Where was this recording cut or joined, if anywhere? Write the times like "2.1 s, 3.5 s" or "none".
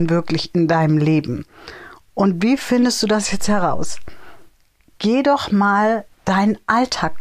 none